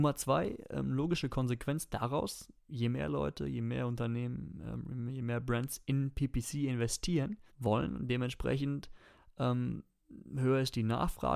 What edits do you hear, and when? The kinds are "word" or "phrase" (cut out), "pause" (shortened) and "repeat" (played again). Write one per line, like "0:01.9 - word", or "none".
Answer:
0:02.6 - pause
0:07.5 - pause